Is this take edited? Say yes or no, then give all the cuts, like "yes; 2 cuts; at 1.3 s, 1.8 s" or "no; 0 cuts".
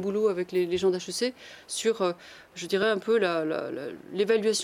no; 0 cuts